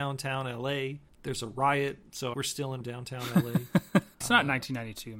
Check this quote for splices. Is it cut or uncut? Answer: cut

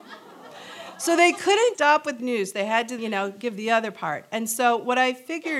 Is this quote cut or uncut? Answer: cut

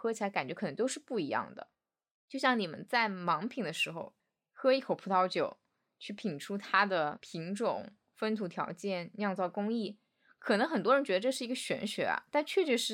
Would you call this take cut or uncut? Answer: uncut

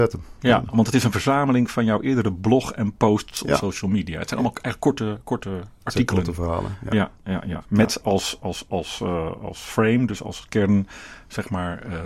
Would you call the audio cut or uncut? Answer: uncut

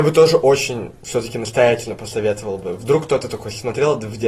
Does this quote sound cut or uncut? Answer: uncut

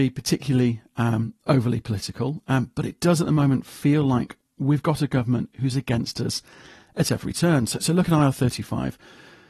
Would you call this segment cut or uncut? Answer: uncut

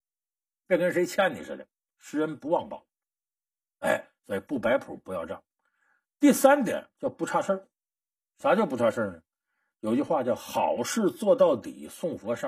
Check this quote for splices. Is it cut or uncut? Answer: uncut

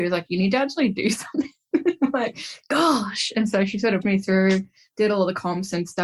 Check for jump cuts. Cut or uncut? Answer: cut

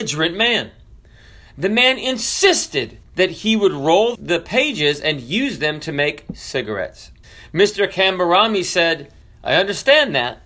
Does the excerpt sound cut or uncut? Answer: cut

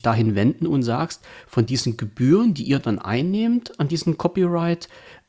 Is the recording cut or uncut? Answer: uncut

